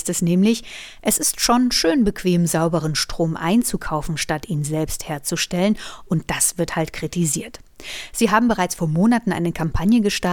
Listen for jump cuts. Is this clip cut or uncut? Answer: uncut